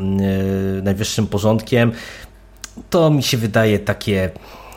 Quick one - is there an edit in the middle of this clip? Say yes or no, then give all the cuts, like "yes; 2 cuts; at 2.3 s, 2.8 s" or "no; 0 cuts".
no; 0 cuts